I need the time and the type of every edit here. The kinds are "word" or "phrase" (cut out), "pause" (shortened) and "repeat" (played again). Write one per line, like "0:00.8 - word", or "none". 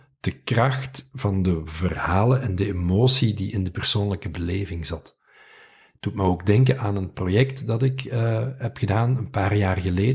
none